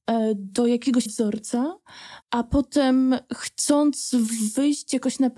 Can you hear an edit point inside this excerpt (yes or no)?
yes